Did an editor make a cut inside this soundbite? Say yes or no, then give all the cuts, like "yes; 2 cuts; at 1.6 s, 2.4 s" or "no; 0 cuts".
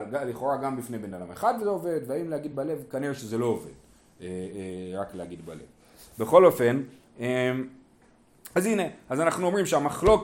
no; 0 cuts